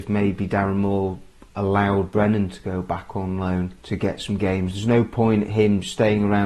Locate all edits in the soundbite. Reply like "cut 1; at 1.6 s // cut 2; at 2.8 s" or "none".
cut 1; at 3.8 s